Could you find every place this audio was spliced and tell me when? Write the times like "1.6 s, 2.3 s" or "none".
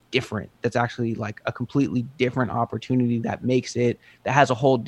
none